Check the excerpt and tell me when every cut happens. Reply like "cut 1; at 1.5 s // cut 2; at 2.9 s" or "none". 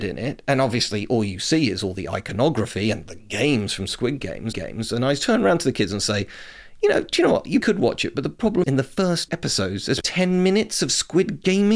cut 1; at 4.5 s // cut 2; at 7.6 s // cut 3; at 8.6 s // cut 4; at 9.3 s // cut 5; at 10.0 s